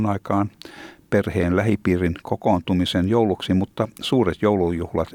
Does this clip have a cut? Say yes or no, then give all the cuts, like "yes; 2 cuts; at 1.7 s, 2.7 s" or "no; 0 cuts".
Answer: no; 0 cuts